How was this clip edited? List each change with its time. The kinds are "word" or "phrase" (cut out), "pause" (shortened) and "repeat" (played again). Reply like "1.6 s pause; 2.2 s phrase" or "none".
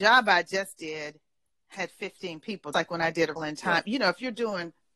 2.7 s word; 3.4 s word